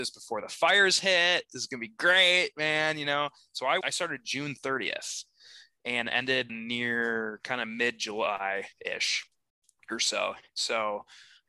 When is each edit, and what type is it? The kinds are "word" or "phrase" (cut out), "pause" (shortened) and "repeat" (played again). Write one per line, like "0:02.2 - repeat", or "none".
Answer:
0:03.8 - word
0:06.5 - word